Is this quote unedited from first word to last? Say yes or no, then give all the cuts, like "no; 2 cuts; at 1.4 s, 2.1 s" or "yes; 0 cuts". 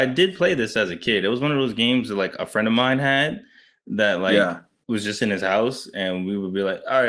yes; 0 cuts